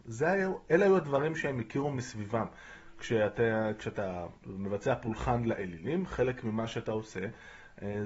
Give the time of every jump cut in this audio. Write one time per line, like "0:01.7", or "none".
none